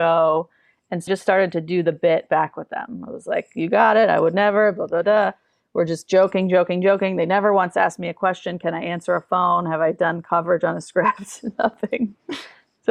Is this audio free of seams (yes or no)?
no